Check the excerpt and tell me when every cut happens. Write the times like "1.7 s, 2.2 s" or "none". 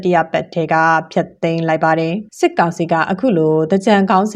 2.3 s